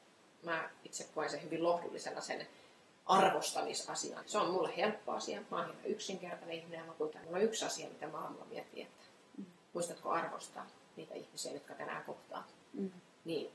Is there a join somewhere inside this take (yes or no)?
yes